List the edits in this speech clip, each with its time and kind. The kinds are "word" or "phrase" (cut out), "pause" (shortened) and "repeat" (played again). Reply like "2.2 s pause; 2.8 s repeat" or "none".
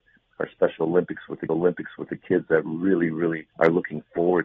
1.5 s repeat; 3.5 s pause